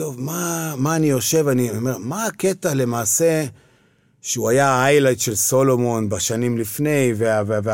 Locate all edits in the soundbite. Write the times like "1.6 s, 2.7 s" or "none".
none